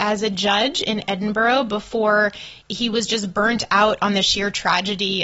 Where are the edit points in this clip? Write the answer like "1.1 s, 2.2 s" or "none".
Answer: 2.6 s